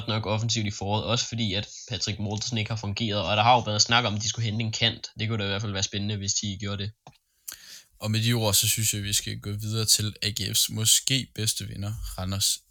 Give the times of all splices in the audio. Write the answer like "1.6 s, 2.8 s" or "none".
none